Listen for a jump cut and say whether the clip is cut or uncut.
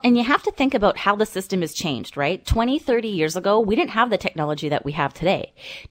uncut